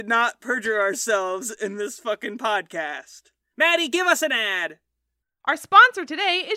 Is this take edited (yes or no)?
no